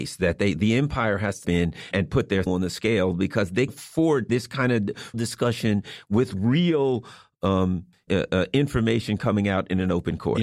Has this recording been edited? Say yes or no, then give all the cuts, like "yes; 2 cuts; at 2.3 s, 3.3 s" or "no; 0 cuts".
yes; 7 cuts; at 1.4 s, 1.9 s, 2.5 s, 3.7 s, 4.3 s, 5.1 s, 8.1 s